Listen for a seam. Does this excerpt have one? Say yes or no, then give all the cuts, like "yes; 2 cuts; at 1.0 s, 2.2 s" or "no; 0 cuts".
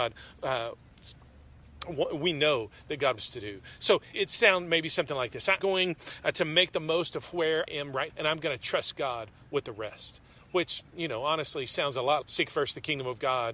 yes; 6 cuts; at 3.2 s, 4.1 s, 5.6 s, 7.7 s, 8.1 s, 12.2 s